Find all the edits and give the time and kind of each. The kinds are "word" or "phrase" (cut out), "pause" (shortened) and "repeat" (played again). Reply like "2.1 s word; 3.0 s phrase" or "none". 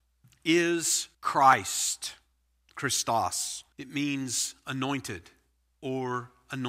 1.1 s pause; 3.7 s pause